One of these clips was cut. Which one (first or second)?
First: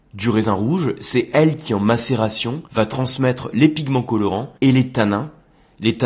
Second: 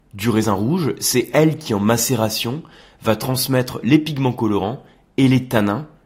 first